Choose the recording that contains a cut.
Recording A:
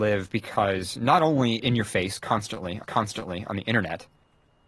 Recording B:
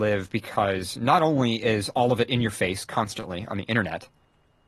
A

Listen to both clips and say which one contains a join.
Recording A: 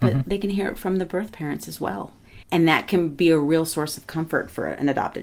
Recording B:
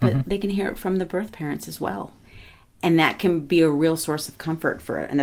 A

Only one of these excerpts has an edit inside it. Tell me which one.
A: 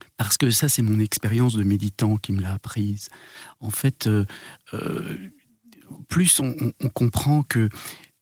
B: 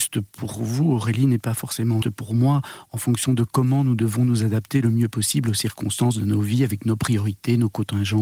B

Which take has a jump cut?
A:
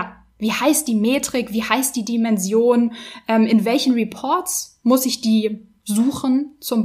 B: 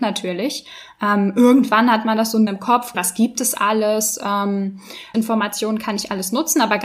B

